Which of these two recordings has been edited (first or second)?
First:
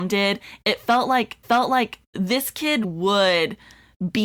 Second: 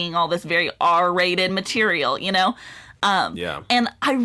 first